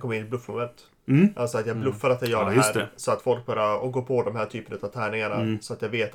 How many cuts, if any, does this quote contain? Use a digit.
0